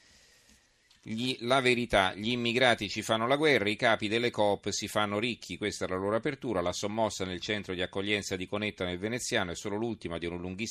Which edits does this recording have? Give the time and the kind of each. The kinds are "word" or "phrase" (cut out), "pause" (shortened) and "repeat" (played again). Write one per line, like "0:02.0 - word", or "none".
none